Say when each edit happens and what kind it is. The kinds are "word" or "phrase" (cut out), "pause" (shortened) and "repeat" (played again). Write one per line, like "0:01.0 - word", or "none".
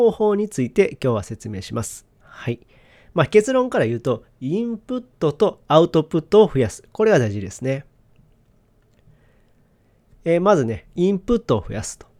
0:02.1 - pause